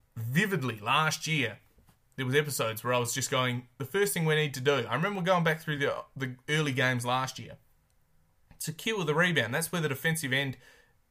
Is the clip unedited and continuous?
yes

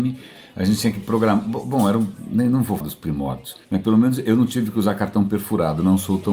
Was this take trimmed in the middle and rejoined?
yes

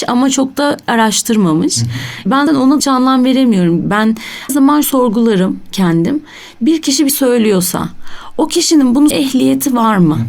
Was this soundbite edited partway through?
yes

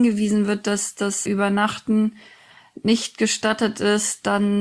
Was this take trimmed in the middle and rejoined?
yes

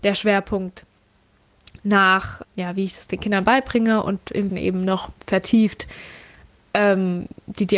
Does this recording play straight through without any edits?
no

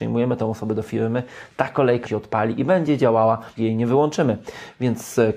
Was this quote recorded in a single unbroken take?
no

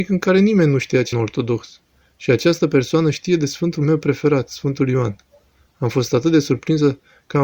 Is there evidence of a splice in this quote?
yes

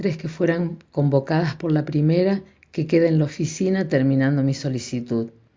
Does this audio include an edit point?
no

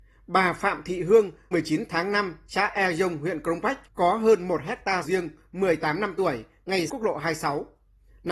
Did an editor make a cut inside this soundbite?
yes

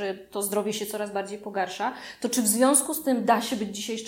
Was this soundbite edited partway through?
no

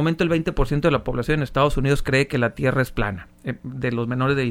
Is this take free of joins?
yes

